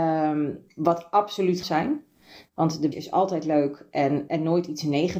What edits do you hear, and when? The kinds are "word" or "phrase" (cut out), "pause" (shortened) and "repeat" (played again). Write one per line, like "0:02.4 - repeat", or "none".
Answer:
0:01.6 - phrase
0:02.9 - word
0:04.3 - word